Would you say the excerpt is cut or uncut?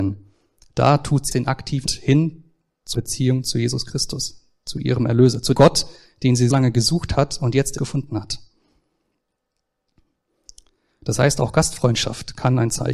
cut